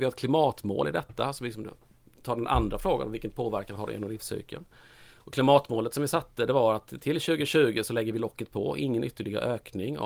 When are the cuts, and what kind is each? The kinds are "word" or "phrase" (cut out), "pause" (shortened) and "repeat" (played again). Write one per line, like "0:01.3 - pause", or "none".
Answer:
none